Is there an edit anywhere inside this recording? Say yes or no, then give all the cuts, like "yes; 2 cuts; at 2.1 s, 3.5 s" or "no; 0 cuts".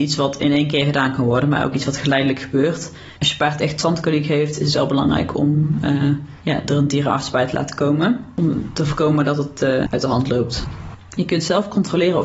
no; 0 cuts